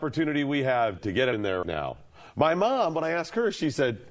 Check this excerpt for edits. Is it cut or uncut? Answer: cut